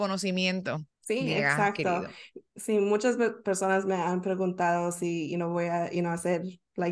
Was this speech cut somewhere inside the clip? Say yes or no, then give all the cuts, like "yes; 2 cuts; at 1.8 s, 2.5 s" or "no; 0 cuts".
yes; 1 cut; at 0.9 s